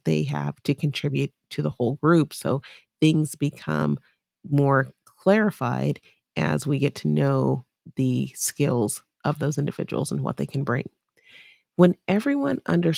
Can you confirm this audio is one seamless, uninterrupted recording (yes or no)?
yes